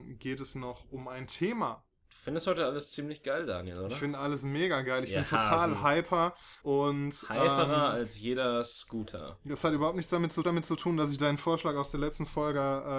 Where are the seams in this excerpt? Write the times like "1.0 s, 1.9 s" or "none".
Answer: 6.6 s, 10.4 s